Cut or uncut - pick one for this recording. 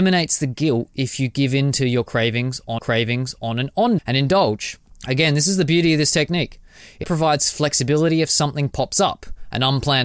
cut